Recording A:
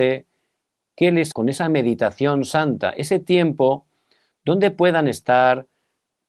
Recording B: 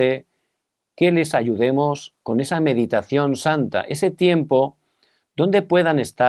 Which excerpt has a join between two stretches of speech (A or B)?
A